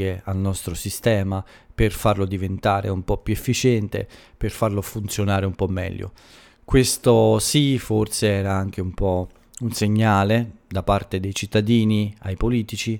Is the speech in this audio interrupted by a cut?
no; 0 cuts

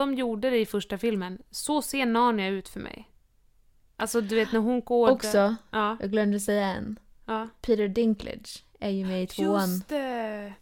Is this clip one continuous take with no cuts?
yes; 0 cuts

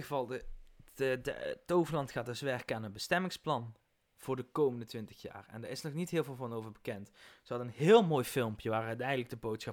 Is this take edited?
no; 0 cuts

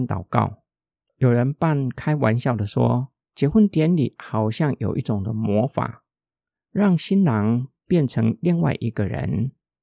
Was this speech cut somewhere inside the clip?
yes; 1 cut; at 3.2 s

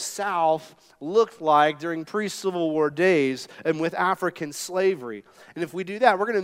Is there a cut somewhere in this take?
no; 0 cuts

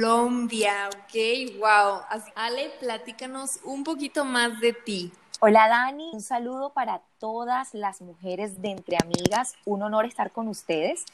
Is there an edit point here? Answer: yes; 2 cuts; at 2.3 s, 6.1 s

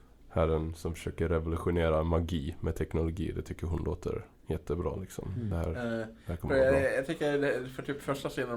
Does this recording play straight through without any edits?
yes; 0 cuts

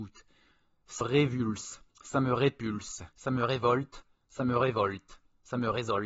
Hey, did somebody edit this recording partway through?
yes; 3 cuts; at 1.0 s, 1.9 s, 3.1 s

